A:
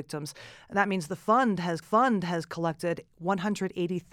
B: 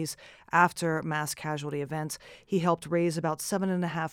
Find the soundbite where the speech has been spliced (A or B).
A